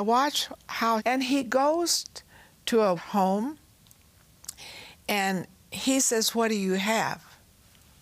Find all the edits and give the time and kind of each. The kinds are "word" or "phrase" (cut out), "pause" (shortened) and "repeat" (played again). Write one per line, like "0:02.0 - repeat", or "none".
0:01.0 - phrase
0:03.0 - word